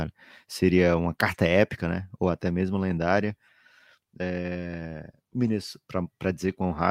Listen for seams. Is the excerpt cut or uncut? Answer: uncut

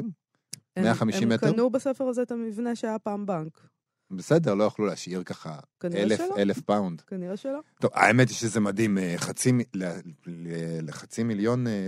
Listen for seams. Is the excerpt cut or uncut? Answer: uncut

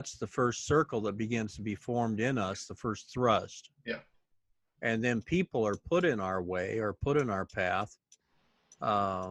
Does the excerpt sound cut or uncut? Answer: uncut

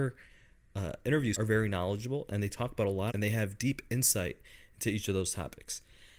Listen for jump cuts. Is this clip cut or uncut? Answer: cut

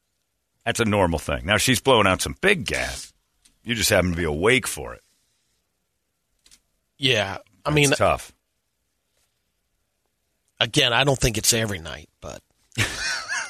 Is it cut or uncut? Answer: uncut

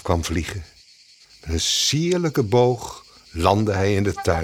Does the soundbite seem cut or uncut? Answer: uncut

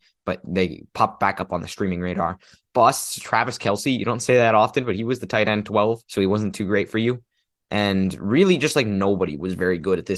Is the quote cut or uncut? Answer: cut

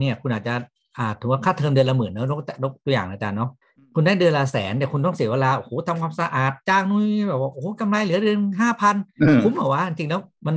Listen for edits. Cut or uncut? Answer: cut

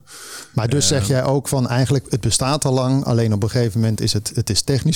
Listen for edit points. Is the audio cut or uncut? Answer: uncut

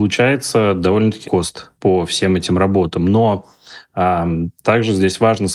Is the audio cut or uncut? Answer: cut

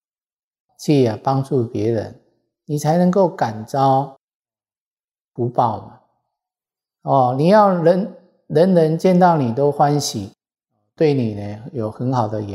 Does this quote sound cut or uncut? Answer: uncut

